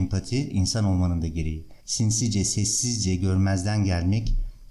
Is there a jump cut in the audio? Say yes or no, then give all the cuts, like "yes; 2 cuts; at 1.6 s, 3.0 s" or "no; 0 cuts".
yes; 1 cut; at 1.8 s